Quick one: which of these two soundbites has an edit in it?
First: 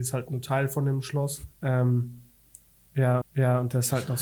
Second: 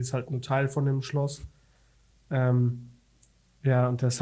first; 2 cuts; at 1.5 s, 3.2 s

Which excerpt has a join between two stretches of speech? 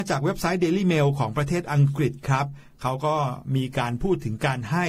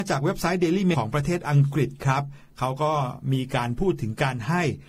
second; 1 cut; at 0.9 s

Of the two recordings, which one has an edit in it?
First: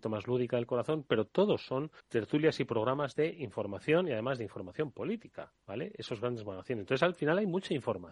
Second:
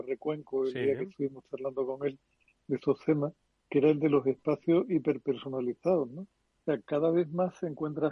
first; 2 cuts; at 2.0 s, 5.6 s

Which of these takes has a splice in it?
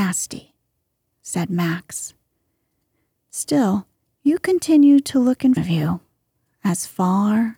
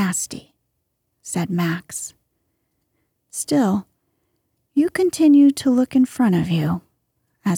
first; 2 cuts; at 4.0 s, 5.6 s

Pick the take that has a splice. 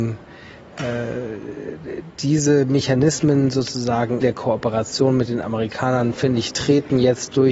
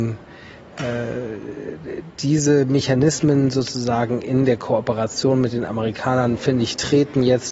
first; 1 cut; at 4.2 s

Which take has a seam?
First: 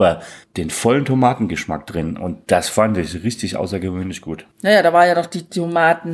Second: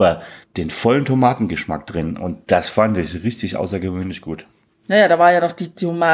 first; 1 cut; at 4.5 s

